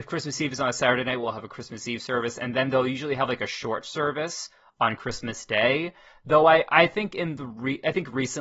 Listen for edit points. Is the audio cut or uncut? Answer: uncut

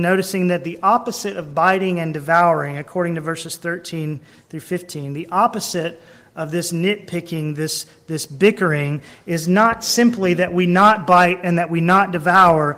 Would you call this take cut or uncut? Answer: uncut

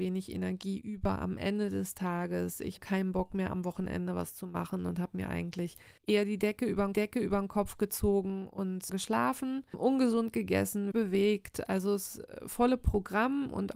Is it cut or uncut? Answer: cut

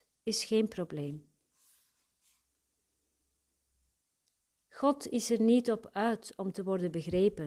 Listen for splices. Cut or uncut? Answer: uncut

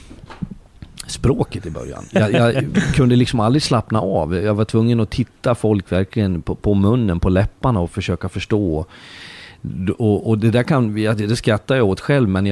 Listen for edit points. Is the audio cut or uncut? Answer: uncut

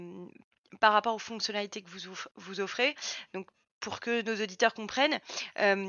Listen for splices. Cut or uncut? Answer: uncut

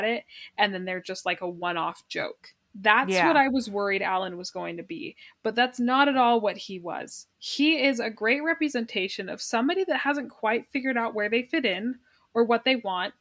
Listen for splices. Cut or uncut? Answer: cut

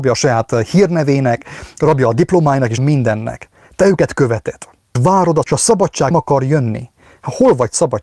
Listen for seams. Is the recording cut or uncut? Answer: cut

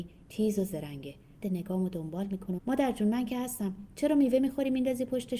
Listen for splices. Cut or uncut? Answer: cut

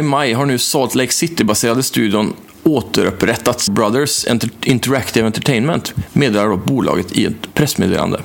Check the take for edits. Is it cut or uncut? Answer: cut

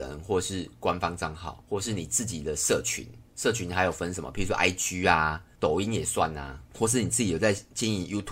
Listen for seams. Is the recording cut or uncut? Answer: cut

